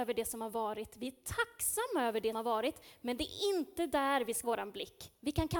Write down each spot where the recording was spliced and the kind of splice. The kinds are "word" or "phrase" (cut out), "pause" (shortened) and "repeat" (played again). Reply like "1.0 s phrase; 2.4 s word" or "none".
2.3 s word; 4.4 s word